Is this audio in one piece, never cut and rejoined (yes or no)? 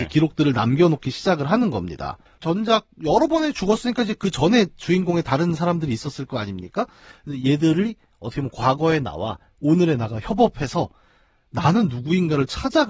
yes